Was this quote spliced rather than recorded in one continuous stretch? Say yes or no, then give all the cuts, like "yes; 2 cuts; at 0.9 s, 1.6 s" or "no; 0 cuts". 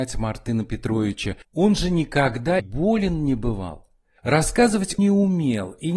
yes; 2 cuts; at 2.6 s, 5.0 s